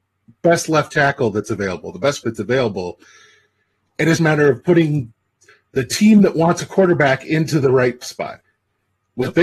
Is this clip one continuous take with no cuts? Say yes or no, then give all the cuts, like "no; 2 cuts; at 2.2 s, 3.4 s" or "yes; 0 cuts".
no; 3 cuts; at 2.2 s, 4.2 s, 8.0 s